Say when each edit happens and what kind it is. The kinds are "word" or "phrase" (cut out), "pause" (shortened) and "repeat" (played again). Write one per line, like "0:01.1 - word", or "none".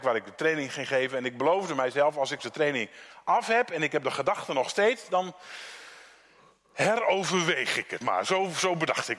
0:02.4 - word
0:08.0 - word